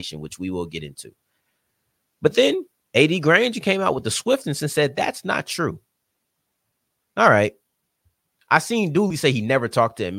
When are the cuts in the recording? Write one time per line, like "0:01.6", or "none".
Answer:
none